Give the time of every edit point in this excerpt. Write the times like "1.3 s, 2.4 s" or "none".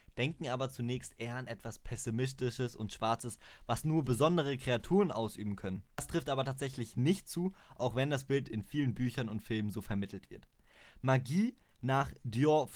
none

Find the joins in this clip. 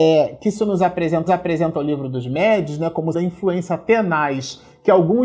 1.3 s, 3.1 s

